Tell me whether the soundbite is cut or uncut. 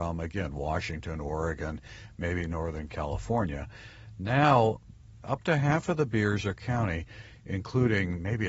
cut